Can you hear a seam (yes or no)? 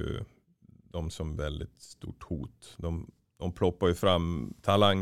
yes